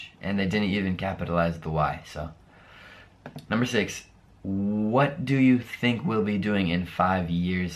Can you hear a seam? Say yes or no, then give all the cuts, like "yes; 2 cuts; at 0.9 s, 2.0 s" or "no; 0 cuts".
no; 0 cuts